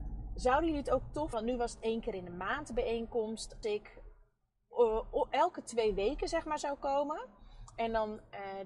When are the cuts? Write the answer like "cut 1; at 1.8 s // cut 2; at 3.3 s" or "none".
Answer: cut 1; at 1.3 s // cut 2; at 3.6 s